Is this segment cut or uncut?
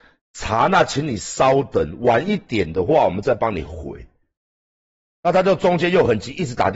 uncut